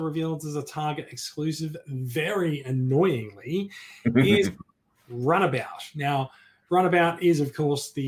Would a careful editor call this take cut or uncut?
uncut